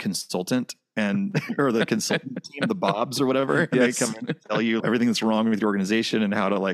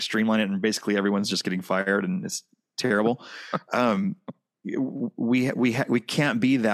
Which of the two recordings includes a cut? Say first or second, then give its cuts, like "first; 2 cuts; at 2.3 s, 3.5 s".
first; 1 cut; at 4.8 s